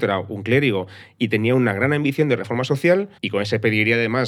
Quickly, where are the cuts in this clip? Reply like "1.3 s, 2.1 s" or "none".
3.2 s